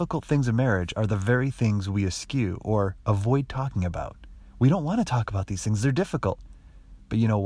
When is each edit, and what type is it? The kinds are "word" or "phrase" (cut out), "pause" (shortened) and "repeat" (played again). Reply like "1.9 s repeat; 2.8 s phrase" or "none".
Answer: none